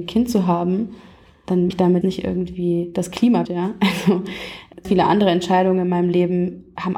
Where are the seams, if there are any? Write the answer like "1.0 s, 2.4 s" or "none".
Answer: 1.7 s, 2.0 s, 3.4 s, 4.8 s